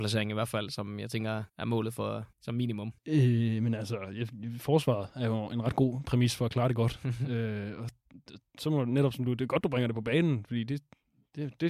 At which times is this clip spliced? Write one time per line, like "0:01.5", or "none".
0:01.5
0:02.3
0:03.0